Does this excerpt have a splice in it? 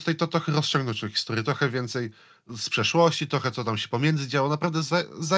no; 0 cuts

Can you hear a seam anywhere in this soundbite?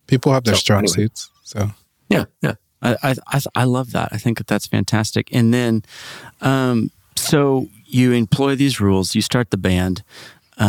no; 0 cuts

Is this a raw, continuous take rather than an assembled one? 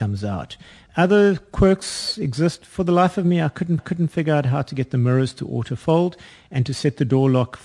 no; 1 cut; at 3.8 s

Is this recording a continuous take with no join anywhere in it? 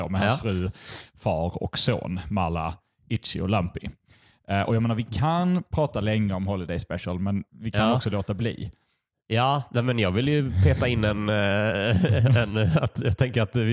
yes; 0 cuts

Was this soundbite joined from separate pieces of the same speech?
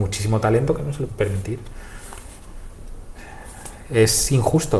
yes; 1 cut; at 1.1 s

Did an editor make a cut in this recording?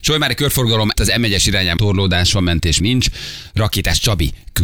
yes; 3 cuts; at 0.9 s, 1.8 s, 2.8 s

